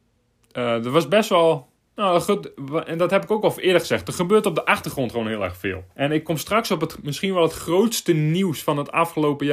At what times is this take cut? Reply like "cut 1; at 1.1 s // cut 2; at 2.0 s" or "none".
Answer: cut 1; at 5.9 s